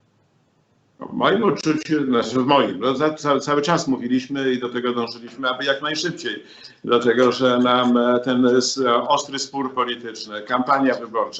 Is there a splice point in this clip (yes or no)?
no